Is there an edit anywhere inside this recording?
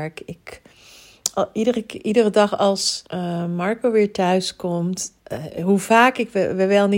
yes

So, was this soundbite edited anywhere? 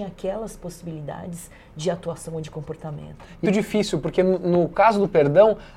yes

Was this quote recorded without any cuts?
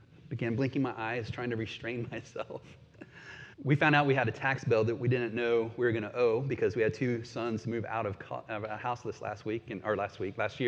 no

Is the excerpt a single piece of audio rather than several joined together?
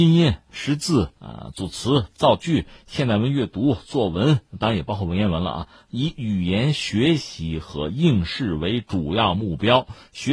no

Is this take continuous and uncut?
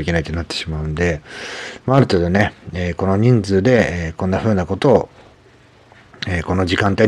yes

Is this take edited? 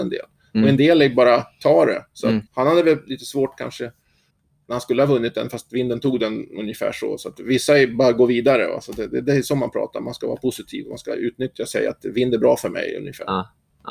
yes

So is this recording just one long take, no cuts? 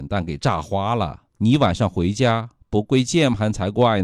no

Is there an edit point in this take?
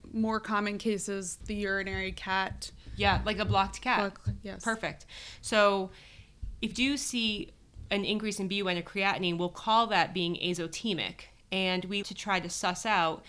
yes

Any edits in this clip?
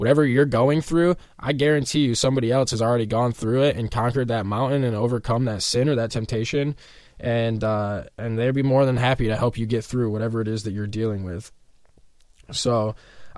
no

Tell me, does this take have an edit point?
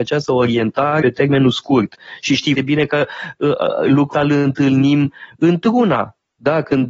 yes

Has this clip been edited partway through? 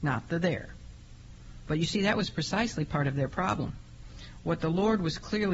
no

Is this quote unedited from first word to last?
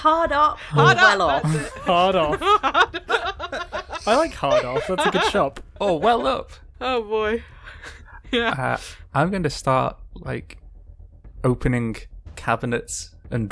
yes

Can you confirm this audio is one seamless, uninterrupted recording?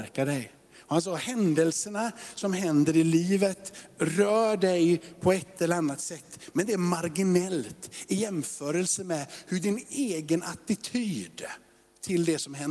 yes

